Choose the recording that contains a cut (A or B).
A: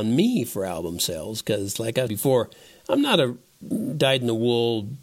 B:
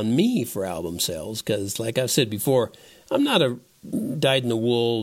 A